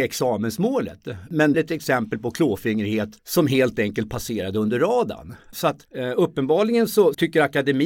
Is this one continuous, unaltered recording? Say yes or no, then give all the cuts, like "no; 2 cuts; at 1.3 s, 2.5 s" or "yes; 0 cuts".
no; 3 cuts; at 1.5 s, 3.2 s, 5.8 s